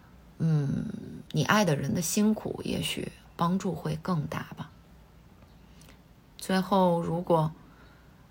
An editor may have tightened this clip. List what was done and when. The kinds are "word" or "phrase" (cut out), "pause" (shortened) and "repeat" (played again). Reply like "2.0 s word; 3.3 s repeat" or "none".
1.3 s pause